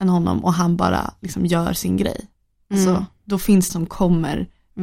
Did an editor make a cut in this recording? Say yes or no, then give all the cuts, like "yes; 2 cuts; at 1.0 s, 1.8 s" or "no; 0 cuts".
yes; 1 cut; at 3.7 s